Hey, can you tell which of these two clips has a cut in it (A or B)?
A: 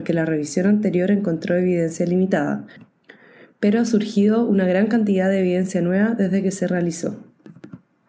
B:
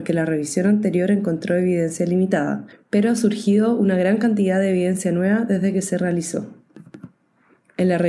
B